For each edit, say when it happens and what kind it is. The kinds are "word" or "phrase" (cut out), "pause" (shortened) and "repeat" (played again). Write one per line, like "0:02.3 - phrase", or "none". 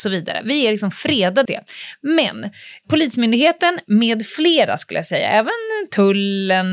0:01.5 - word